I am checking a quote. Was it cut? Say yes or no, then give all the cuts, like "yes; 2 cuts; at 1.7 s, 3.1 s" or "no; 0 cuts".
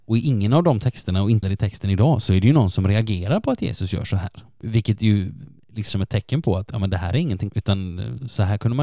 yes; 3 cuts; at 1.4 s, 5.9 s, 7.5 s